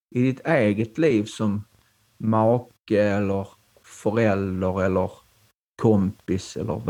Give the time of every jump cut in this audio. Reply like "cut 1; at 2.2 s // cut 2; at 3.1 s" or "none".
none